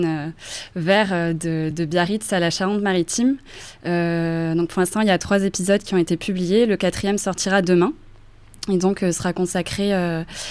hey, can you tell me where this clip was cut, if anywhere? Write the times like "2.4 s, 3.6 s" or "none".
none